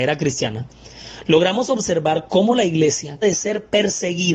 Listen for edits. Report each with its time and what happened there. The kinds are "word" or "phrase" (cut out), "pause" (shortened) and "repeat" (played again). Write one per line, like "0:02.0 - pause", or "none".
0:03.2 - phrase